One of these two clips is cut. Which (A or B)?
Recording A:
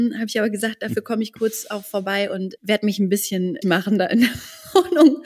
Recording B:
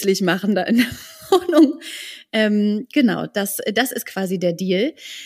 A